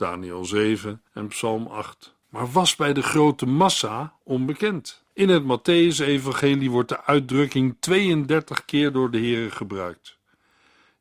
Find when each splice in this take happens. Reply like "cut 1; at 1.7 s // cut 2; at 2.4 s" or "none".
cut 1; at 1.1 s // cut 2; at 2.2 s // cut 3; at 5.1 s